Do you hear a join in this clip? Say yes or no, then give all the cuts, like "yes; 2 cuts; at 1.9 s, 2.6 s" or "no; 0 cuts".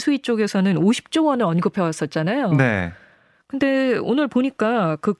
no; 0 cuts